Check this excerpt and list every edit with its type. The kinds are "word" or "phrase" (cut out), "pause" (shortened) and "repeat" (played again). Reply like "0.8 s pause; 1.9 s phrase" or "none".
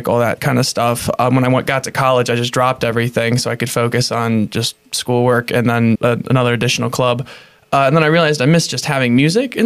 5.9 s word